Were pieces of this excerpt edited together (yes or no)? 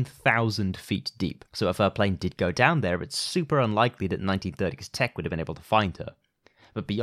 yes